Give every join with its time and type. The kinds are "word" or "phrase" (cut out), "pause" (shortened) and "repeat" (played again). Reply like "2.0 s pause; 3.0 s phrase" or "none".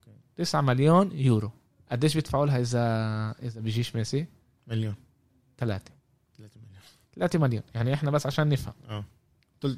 none